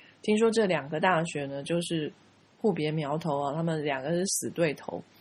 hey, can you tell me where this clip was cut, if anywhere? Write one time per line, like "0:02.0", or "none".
none